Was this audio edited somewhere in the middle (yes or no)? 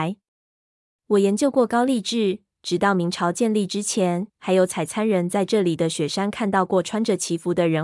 yes